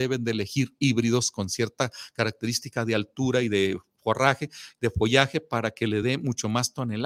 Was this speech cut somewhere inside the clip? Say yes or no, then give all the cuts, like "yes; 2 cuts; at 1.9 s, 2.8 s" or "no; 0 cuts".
no; 0 cuts